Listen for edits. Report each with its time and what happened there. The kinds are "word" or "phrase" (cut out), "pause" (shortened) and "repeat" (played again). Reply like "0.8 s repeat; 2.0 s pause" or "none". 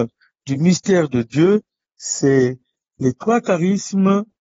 none